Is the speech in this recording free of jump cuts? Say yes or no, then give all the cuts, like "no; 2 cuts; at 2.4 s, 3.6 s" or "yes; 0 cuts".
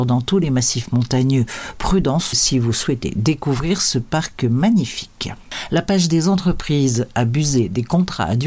no; 1 cut; at 2.3 s